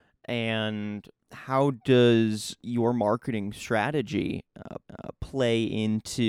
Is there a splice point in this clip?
yes; 2 cuts; at 1.2 s, 4.8 s

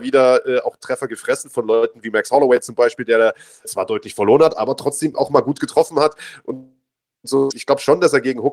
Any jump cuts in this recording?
yes; 3 cuts; at 3.6 s, 5.1 s, 7.5 s

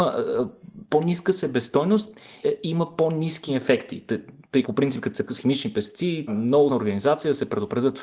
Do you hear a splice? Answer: yes; 6 cuts; at 2.4 s, 3.5 s, 4.6 s, 5.3 s, 6.3 s, 6.7 s

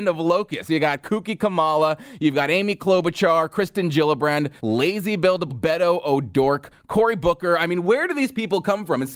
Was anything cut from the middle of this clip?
yes; 2 cuts; at 4.6 s, 5.5 s

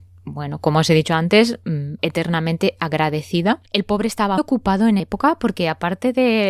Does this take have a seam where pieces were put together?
yes; 4 cuts; at 2.0 s, 3.7 s, 4.4 s, 5.0 s

